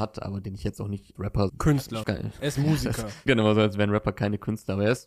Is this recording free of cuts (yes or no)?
no